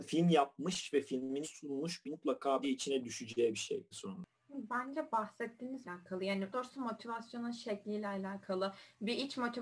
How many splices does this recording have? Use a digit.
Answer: 6